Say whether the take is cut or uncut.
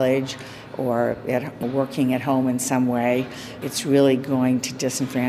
cut